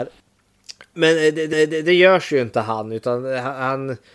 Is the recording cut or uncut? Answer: cut